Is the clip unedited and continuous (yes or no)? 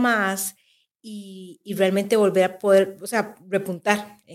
yes